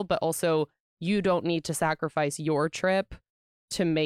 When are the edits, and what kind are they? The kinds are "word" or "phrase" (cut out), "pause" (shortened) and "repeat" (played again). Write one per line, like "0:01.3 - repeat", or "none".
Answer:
none